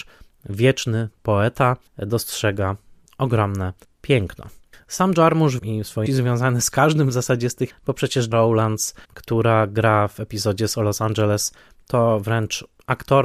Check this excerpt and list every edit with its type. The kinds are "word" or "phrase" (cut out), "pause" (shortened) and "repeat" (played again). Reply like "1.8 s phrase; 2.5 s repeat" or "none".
1.9 s pause; 5.6 s phrase; 6.1 s word; 7.7 s word; 8.3 s word; 9.0 s pause